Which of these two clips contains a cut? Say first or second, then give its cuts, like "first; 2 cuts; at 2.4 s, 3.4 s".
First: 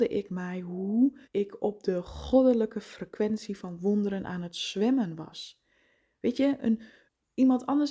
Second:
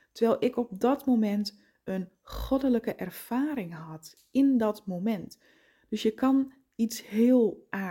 first; 1 cut; at 1.2 s